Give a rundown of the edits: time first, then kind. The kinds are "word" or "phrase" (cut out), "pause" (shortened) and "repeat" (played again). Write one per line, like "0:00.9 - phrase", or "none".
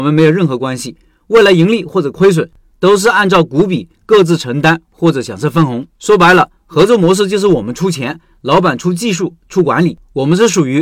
0:05.9 - pause